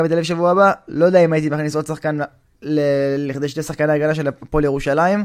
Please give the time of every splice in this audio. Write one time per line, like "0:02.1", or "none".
none